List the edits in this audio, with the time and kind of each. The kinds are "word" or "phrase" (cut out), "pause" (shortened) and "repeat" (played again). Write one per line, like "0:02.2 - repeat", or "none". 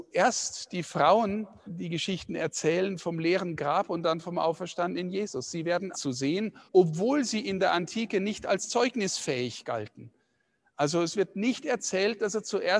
0:01.7 - word
0:05.9 - phrase
0:06.7 - pause